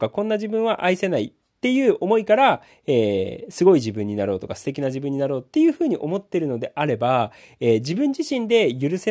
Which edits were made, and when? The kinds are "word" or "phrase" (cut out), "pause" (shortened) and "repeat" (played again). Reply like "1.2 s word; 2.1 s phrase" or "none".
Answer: none